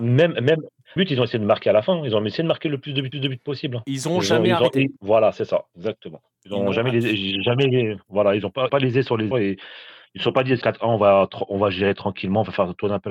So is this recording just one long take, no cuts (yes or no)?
no